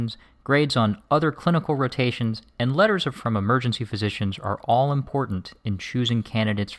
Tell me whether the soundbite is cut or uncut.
cut